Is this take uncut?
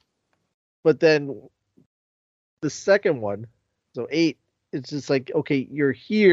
yes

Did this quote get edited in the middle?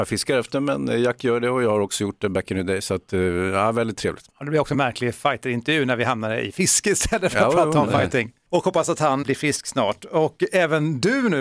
yes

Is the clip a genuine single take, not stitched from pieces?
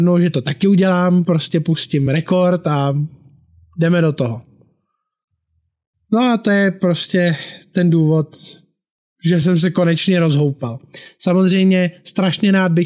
yes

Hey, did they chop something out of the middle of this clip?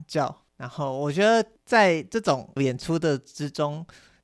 yes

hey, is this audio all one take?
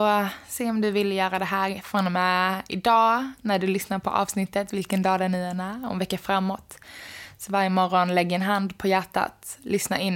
yes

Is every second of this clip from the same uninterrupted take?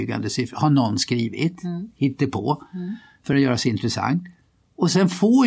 yes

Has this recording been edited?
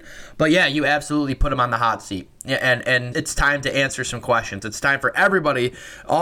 yes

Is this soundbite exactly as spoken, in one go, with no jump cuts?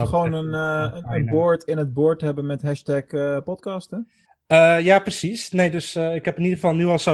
no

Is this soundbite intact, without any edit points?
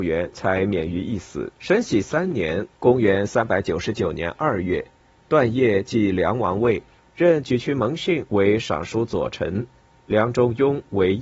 no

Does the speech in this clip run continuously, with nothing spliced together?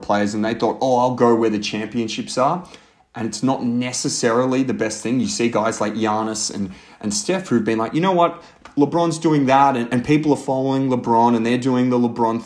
yes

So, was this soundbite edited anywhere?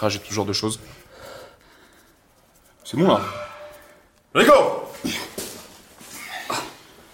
no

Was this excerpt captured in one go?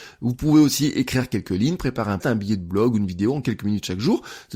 no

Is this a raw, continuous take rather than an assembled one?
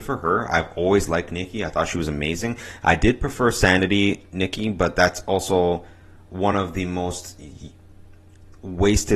yes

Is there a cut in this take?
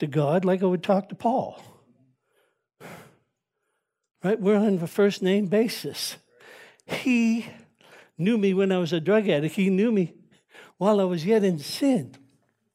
no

